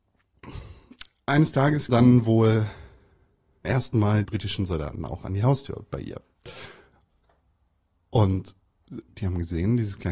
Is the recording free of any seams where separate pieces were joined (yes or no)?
no